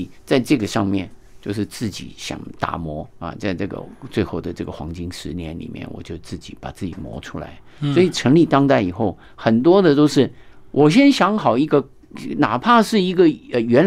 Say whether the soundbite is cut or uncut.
cut